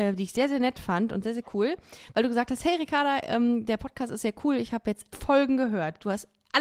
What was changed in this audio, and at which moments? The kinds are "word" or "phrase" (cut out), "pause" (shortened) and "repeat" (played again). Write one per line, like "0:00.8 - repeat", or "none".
0:05.1 - word